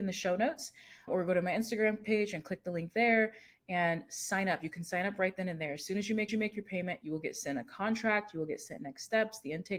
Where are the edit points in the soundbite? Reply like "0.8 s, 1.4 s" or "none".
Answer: 1.1 s, 6.3 s